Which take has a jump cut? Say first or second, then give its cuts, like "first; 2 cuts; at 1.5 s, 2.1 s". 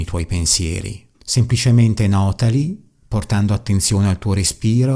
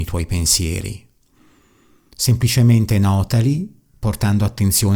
first; 1 cut; at 1.1 s